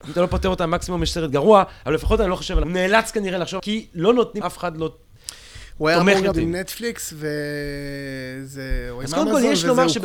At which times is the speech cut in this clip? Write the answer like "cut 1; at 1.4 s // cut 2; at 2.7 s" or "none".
cut 1; at 2.6 s // cut 2; at 3.6 s // cut 3; at 4.4 s // cut 4; at 6.3 s